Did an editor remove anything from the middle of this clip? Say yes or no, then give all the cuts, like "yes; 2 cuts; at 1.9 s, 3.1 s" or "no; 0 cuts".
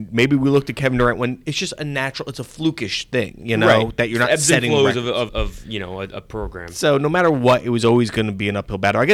yes; 1 cut; at 5.3 s